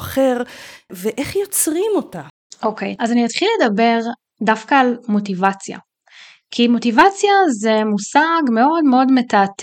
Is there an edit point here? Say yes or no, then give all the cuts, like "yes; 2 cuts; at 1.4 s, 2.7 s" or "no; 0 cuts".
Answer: no; 0 cuts